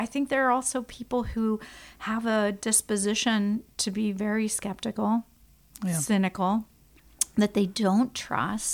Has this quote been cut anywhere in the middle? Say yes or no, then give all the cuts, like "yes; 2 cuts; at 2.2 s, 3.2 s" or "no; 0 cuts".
no; 0 cuts